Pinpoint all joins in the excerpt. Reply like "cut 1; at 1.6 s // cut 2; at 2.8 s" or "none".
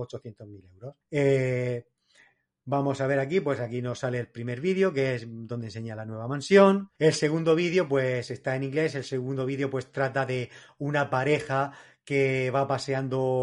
cut 1; at 1.0 s // cut 2; at 7.0 s